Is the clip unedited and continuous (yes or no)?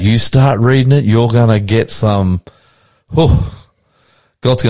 yes